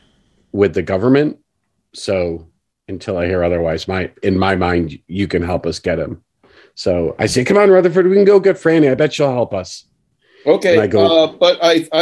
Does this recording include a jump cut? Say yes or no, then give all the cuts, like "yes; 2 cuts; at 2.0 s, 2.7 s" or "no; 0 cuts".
no; 0 cuts